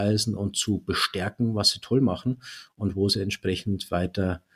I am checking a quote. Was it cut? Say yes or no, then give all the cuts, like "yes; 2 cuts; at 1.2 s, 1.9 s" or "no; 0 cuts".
no; 0 cuts